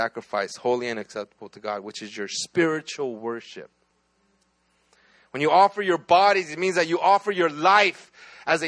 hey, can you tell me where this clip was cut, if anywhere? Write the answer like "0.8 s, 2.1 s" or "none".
none